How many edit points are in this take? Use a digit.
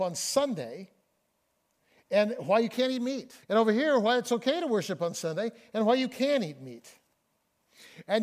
1